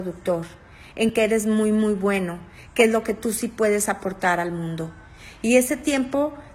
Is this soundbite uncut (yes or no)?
yes